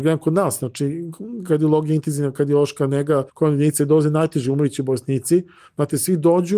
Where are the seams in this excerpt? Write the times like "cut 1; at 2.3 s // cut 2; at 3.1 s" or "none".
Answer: cut 1; at 3.3 s